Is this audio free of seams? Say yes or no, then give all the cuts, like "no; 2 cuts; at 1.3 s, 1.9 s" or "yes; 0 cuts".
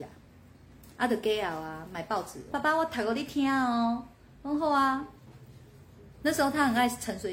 no; 1 cut; at 2.5 s